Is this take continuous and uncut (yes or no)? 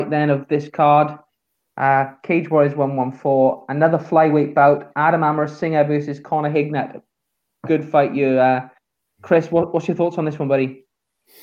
yes